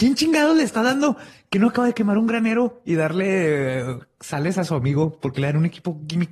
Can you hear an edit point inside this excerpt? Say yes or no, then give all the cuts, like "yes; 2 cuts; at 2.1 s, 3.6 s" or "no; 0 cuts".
no; 0 cuts